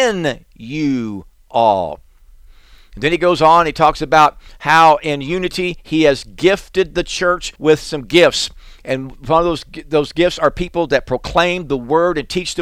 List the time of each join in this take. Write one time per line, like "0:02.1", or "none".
0:07.5